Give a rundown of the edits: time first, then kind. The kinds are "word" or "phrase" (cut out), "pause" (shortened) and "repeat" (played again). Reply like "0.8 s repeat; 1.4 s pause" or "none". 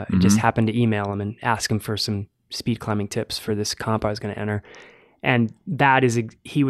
none